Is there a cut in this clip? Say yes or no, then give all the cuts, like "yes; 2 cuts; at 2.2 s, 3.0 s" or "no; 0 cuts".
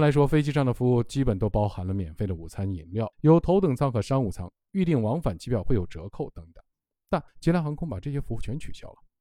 yes; 2 cuts; at 3.1 s, 7.3 s